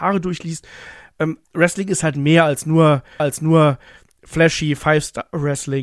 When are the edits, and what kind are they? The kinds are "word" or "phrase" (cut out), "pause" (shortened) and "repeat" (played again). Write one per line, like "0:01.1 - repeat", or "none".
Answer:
0:01.4 - pause
0:03.2 - repeat